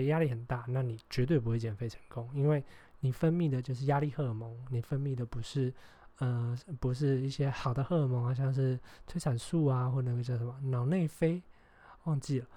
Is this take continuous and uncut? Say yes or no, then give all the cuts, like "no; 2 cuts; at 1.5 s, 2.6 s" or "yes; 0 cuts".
yes; 0 cuts